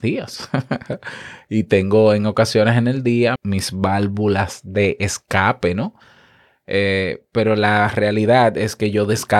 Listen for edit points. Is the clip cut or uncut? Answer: cut